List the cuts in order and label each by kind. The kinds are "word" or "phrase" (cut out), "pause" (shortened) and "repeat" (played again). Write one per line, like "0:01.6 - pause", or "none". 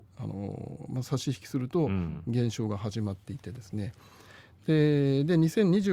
none